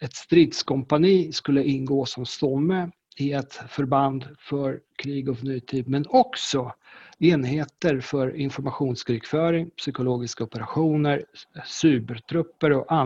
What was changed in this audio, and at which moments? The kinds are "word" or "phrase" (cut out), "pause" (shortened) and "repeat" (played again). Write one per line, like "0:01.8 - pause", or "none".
none